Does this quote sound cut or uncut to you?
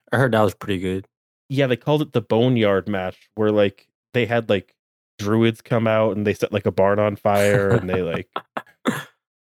uncut